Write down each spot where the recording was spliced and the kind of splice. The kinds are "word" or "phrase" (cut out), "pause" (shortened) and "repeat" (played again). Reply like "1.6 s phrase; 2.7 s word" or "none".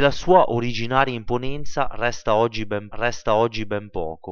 2.9 s repeat